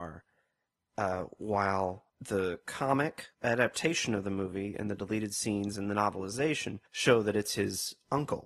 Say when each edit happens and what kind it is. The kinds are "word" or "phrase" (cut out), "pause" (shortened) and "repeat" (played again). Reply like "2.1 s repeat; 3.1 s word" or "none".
2.1 s pause; 3.3 s pause; 6.9 s pause